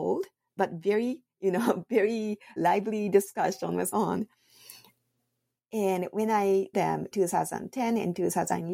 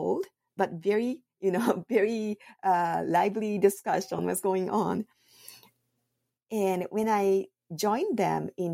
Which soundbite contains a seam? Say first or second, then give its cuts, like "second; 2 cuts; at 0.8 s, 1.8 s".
first; 4 cuts; at 2.6 s, 3.9 s, 6.7 s, 7.1 s